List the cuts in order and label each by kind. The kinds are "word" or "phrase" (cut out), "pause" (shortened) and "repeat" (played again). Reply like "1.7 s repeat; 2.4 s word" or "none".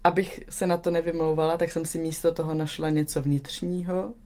none